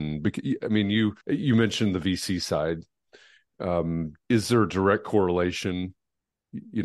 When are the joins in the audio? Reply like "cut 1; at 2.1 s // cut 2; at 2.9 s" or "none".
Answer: cut 1; at 1.2 s // cut 2; at 4.2 s